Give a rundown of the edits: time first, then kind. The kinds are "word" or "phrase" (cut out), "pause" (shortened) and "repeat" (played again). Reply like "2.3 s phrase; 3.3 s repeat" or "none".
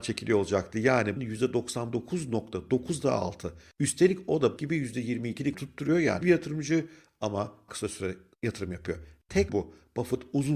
1.2 s word; 4.6 s word; 5.5 s word; 6.2 s word; 7.7 s word; 9.5 s word